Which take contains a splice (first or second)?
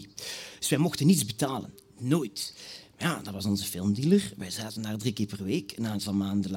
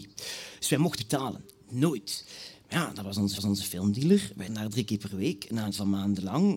second